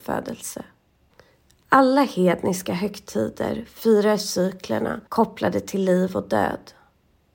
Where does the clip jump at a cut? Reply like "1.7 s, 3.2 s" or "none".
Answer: 5.1 s